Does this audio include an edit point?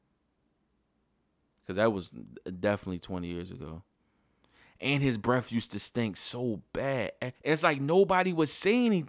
yes; 1 cut; at 7.4 s

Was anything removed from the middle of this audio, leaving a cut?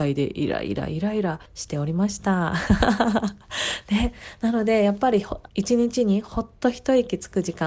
yes; 2 cuts; at 1.5 s, 5.5 s

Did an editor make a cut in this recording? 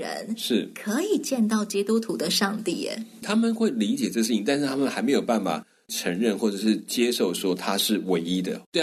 yes; 1 cut; at 3.2 s

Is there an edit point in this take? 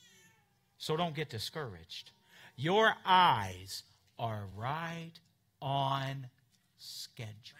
no; 0 cuts

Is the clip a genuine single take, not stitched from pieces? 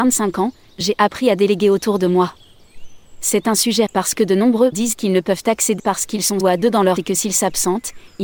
no; 5 cuts; at 3.9 s, 4.7 s, 5.8 s, 6.4 s, 7.0 s

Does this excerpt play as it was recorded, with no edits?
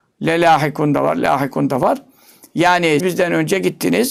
no; 1 cut; at 3.0 s

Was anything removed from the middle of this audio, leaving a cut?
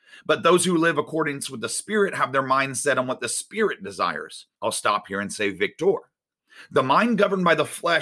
yes; 1 cut; at 4.5 s

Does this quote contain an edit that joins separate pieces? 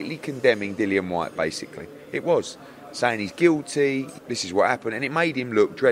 yes; 1 cut; at 4.2 s

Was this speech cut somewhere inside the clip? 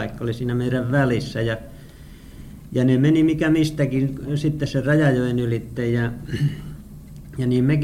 no; 0 cuts

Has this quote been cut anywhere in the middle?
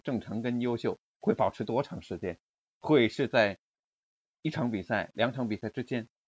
no; 0 cuts

